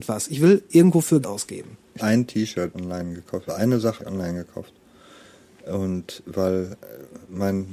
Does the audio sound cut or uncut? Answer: cut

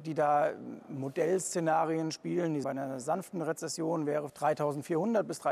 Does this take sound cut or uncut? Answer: cut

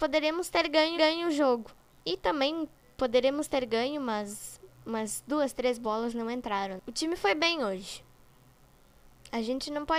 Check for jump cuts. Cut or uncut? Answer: cut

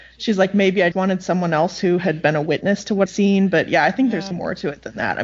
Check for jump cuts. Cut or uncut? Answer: cut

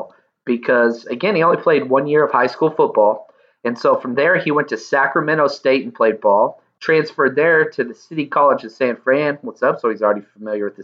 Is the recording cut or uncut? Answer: uncut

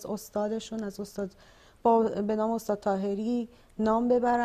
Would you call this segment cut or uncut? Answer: uncut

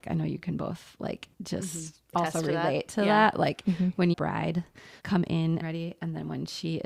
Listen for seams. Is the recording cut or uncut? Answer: cut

